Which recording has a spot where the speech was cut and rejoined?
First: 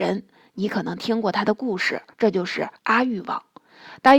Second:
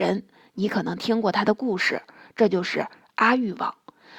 first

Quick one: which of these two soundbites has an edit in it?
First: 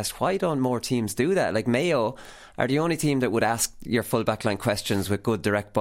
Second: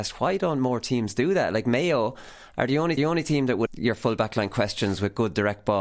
second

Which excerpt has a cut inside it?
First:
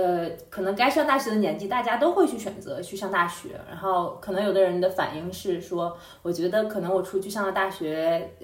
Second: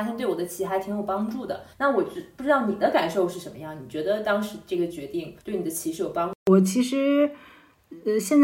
second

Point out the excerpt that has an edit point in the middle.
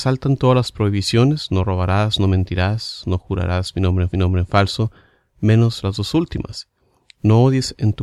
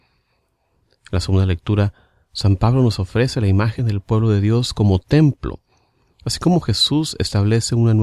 first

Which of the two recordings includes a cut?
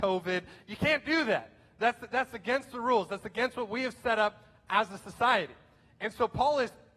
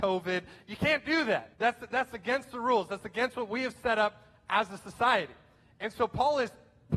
second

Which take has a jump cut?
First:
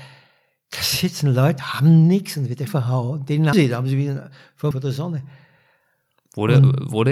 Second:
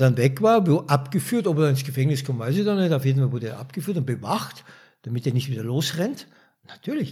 first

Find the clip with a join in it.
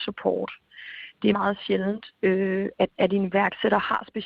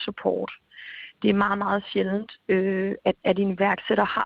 first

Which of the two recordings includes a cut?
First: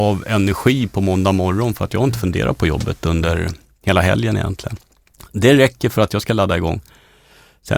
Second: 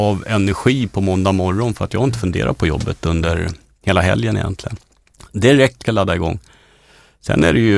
second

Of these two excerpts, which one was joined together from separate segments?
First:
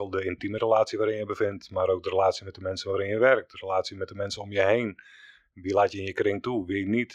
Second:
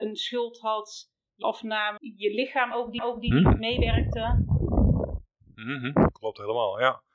second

